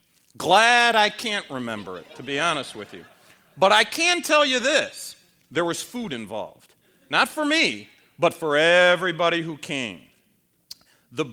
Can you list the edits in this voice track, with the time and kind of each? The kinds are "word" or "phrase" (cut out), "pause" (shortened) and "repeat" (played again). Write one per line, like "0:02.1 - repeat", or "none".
none